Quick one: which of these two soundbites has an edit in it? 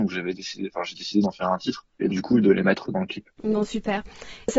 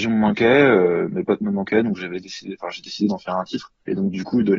first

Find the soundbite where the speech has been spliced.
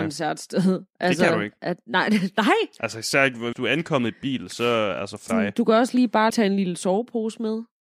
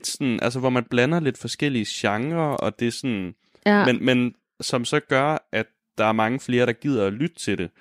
first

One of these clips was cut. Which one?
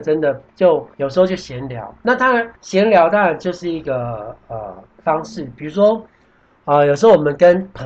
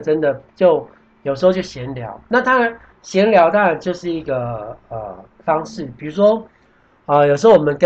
first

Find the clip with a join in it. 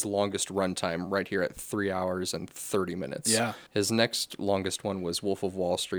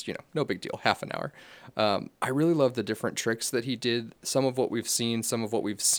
first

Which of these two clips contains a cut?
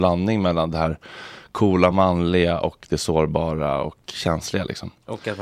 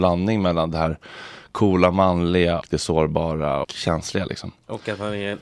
second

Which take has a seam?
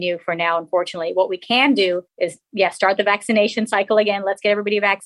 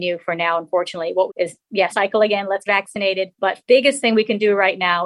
second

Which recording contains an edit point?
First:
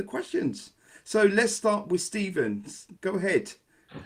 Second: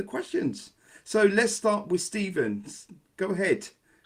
first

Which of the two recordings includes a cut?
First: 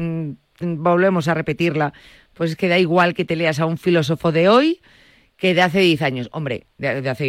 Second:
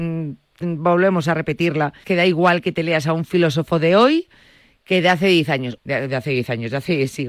second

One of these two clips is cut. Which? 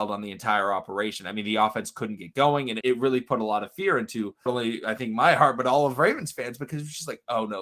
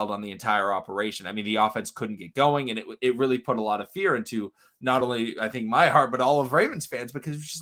first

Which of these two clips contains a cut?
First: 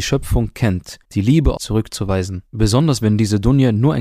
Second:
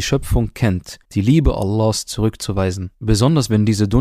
first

